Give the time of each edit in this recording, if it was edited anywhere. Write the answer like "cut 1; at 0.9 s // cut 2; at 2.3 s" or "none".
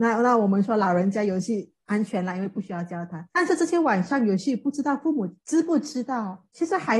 cut 1; at 3.3 s